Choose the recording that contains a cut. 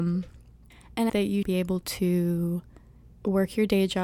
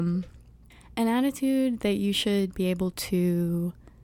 first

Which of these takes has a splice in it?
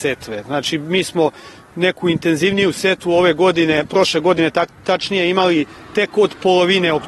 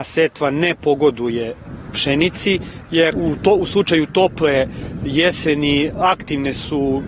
second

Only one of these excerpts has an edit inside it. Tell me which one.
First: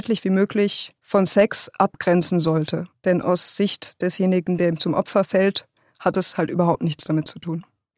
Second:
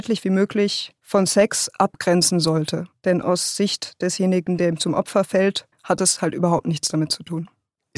second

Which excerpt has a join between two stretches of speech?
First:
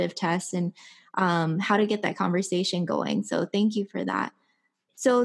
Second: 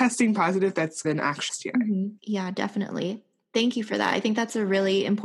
second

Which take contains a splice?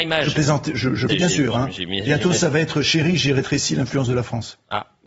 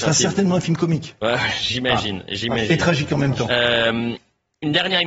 first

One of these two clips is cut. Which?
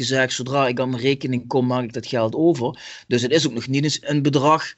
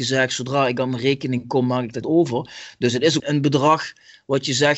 second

